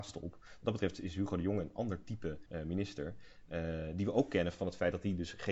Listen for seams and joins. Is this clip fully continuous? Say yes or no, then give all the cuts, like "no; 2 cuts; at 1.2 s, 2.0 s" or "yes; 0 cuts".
no; 1 cut; at 2.5 s